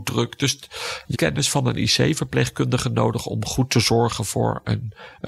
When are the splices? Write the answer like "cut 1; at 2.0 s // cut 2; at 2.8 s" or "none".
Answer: cut 1; at 1.1 s